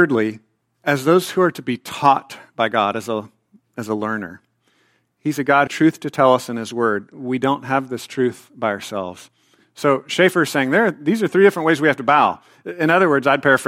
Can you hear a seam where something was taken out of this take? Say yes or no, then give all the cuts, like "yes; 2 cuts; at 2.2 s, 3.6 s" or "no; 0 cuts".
yes; 1 cut; at 5.7 s